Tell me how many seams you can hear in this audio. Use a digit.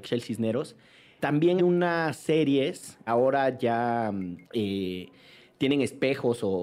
4